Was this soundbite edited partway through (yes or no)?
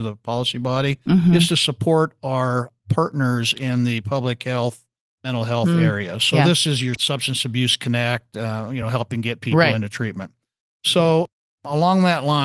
no